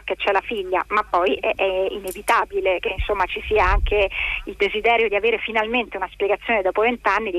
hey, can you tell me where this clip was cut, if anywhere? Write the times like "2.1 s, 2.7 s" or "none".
none